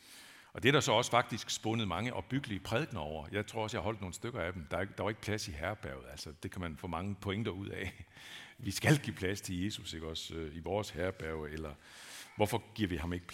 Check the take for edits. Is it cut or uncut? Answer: uncut